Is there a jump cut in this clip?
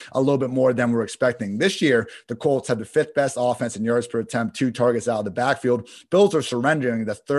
no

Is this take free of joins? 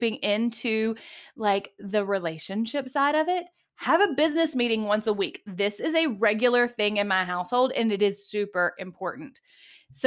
yes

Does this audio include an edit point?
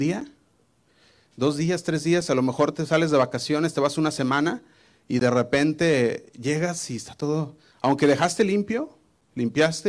no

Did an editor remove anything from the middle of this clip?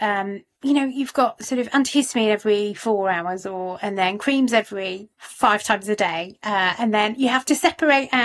no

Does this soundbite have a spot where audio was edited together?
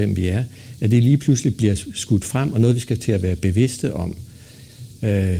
no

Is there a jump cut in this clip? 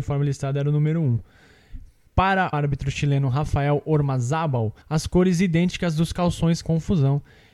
yes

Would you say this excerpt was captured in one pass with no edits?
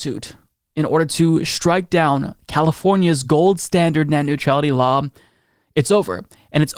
yes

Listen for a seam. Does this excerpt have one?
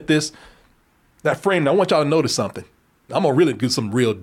no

